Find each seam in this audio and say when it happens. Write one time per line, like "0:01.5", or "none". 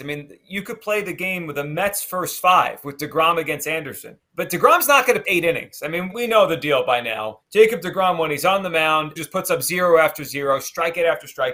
0:04.2
0:05.2
0:06.1
0:07.4
0:09.2